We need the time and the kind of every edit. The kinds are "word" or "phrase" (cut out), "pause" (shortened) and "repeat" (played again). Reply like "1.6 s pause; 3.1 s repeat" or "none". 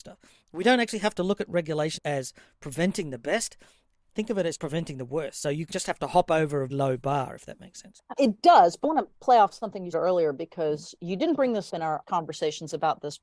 2.0 s word; 4.6 s word; 5.7 s word; 6.7 s word; 8.2 s word; 8.8 s word; 9.9 s word; 11.7 s word; 12.0 s word